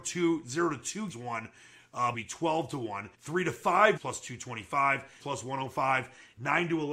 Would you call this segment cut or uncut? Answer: cut